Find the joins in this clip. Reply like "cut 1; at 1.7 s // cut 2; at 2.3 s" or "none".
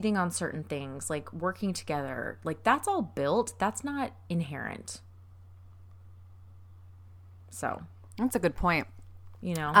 none